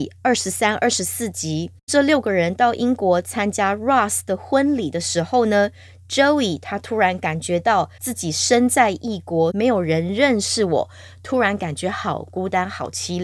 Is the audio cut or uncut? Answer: uncut